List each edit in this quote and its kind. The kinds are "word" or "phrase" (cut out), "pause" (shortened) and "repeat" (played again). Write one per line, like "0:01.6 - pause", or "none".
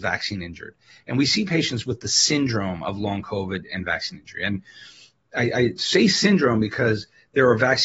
none